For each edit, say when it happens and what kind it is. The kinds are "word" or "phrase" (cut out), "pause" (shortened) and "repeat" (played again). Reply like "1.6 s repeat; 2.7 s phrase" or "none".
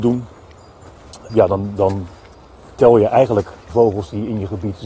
1.3 s word; 3.7 s word